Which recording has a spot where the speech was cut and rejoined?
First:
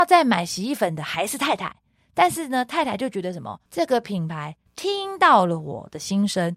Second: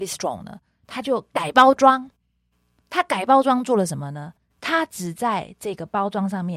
first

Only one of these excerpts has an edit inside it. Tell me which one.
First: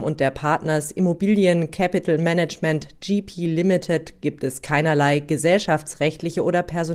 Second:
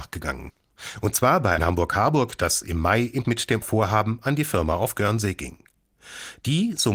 second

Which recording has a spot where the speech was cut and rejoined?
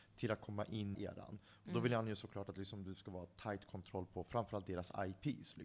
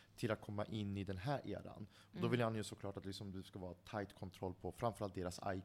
first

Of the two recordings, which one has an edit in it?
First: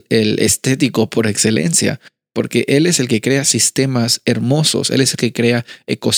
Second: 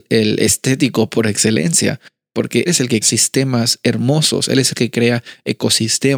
second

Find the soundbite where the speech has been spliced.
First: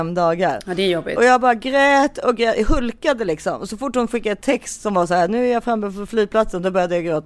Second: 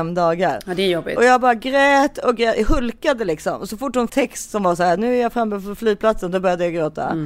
second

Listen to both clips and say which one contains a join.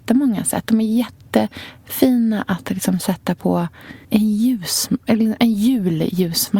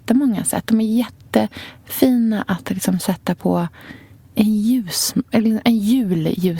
first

